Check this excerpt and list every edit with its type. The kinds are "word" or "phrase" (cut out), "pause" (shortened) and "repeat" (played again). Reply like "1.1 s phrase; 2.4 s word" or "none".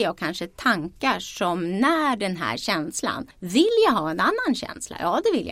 3.3 s pause